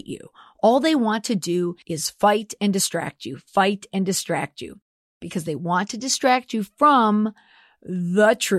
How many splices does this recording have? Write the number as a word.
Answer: one